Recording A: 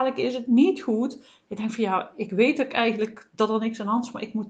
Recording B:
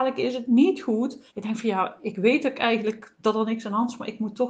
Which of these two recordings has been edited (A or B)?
B